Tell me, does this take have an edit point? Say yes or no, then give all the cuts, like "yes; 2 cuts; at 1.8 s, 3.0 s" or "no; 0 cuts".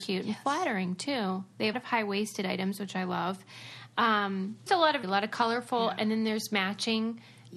yes; 3 cuts; at 1.7 s, 4.7 s, 5.0 s